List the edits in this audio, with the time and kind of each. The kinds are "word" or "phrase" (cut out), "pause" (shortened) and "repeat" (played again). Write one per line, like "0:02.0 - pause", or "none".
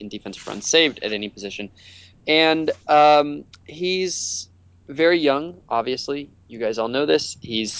none

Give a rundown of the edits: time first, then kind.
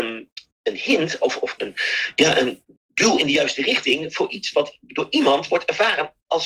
0:01.6 - word
0:02.8 - pause

